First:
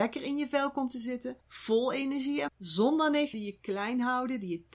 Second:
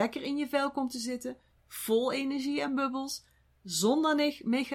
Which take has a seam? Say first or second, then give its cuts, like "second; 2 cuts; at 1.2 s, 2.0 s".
first; 3 cuts; at 1.4 s, 2.5 s, 3.3 s